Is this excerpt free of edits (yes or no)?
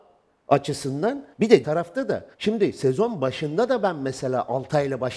no